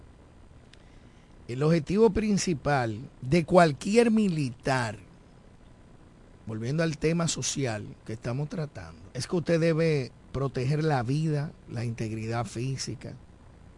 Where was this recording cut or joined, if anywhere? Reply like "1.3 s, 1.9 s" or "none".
3.1 s, 9.1 s